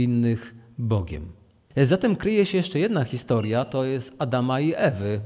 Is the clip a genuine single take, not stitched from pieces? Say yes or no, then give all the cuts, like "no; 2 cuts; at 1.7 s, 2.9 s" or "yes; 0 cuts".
yes; 0 cuts